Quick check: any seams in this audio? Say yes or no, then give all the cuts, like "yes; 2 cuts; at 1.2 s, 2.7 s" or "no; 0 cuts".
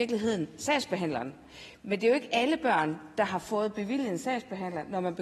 no; 0 cuts